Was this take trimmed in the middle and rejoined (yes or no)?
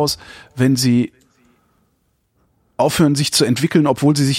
no